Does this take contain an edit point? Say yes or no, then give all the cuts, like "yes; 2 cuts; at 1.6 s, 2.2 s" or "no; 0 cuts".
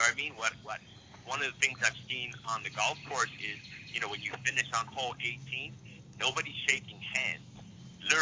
no; 0 cuts